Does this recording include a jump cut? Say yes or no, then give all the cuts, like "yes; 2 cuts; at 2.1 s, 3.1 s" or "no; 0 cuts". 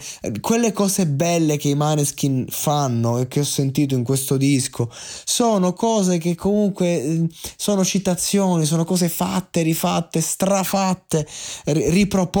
no; 0 cuts